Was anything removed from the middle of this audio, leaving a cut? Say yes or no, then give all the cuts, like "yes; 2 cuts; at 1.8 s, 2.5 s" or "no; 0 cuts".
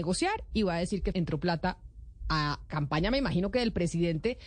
yes; 2 cuts; at 1.1 s, 2.7 s